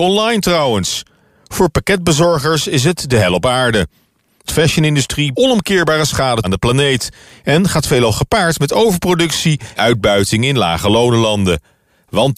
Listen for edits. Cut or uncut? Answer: cut